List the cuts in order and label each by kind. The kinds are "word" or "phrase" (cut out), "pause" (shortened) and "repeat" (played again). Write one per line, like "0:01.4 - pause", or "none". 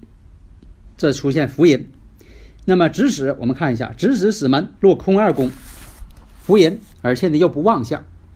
0:00.9 - pause
0:04.8 - pause
0:06.9 - pause